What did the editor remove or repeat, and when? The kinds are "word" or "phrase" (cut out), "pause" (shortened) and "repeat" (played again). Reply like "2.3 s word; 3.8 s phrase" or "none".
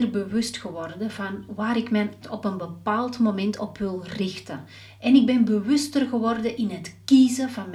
2.2 s word